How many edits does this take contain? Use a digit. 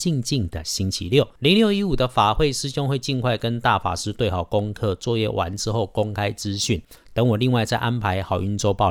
1